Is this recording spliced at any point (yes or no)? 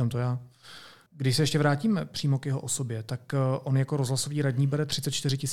no